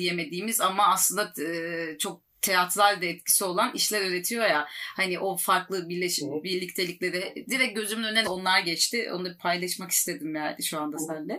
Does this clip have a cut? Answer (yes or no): yes